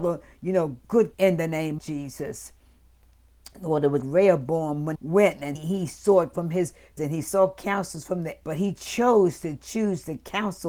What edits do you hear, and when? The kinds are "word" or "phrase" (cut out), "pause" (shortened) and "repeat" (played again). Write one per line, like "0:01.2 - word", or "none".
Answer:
0:01.1 - word
0:01.8 - word
0:04.0 - word
0:04.9 - word
0:05.5 - word
0:06.3 - word
0:07.0 - word
0:08.4 - word